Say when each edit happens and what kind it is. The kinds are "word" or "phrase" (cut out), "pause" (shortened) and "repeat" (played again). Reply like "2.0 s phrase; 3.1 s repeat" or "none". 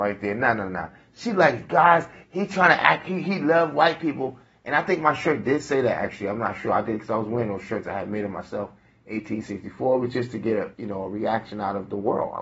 none